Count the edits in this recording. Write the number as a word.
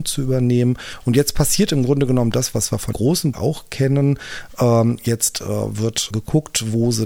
three